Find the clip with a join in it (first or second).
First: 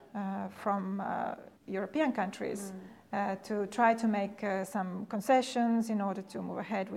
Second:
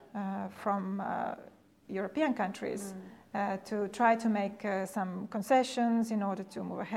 first